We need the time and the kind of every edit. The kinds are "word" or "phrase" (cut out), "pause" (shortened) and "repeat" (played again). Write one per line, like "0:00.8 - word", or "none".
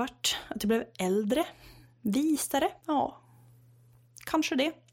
0:02.8 - pause